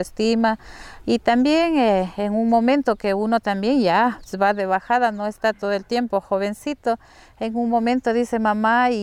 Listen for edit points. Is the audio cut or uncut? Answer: uncut